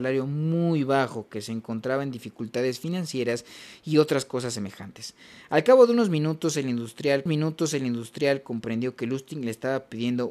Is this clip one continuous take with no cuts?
no; 1 cut; at 7.3 s

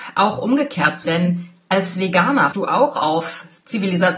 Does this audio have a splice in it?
yes; 2 cuts; at 1.0 s, 2.5 s

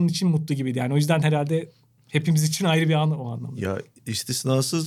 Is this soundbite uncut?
yes; 0 cuts

